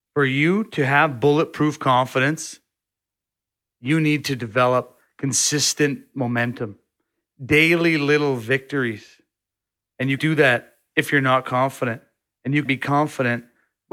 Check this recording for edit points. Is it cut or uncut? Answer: cut